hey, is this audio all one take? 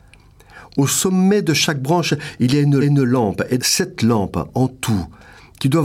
no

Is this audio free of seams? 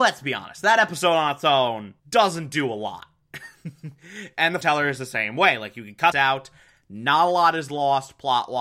no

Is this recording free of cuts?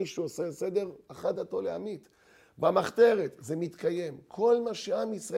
yes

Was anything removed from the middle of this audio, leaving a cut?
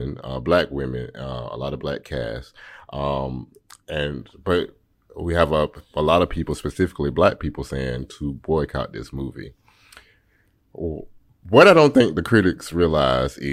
no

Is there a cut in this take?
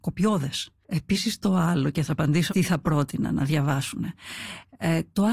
yes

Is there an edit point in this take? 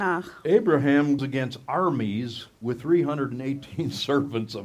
yes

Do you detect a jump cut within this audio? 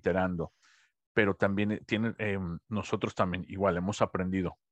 no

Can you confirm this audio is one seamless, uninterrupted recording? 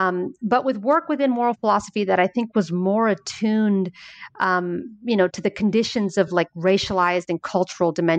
yes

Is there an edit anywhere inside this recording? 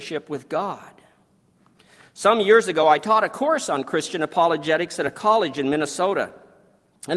no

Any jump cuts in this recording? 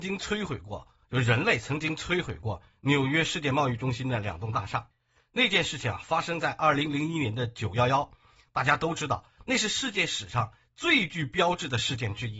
no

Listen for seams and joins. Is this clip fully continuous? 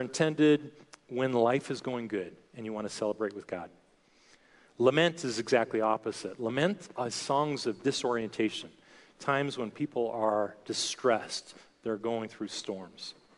yes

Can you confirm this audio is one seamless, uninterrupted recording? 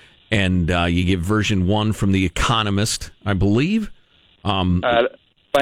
yes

